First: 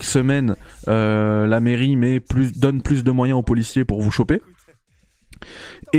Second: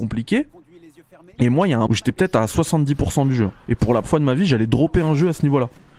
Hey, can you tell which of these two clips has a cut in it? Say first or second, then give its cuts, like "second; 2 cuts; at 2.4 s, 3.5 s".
second; 3 cuts; at 1.9 s, 3.6 s, 4.0 s